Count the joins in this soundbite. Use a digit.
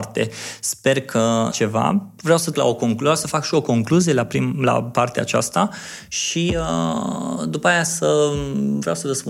2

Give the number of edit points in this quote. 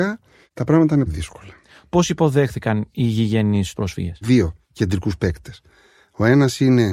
3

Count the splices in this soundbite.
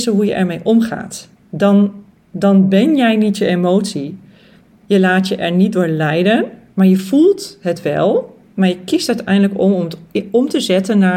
1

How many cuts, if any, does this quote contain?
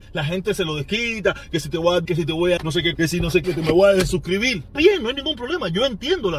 5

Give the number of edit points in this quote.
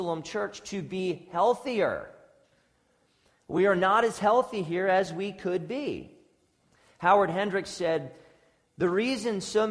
0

